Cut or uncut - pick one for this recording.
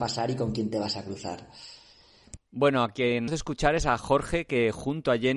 cut